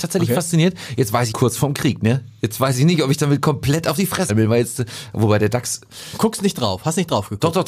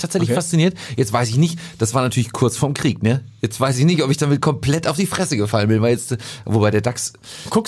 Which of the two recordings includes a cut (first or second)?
first